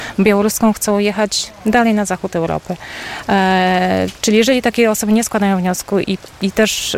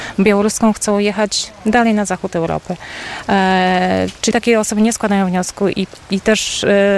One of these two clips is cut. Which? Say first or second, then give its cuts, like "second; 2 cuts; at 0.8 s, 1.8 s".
second; 1 cut; at 4.3 s